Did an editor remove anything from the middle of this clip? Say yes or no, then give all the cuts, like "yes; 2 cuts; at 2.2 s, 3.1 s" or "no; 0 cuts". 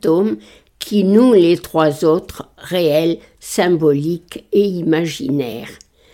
no; 0 cuts